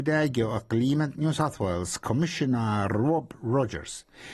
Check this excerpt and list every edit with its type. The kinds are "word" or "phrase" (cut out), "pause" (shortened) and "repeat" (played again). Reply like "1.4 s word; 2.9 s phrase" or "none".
none